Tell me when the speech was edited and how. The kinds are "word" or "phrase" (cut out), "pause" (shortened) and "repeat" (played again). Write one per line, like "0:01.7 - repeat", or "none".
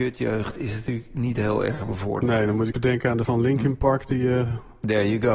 0:02.7 - word
0:03.2 - word